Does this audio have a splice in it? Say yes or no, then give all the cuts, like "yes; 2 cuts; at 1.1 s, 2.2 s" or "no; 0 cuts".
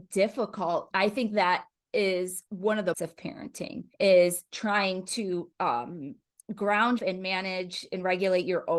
yes; 6 cuts; at 0.9 s, 2.5 s, 2.9 s, 3.9 s, 5.5 s, 7.0 s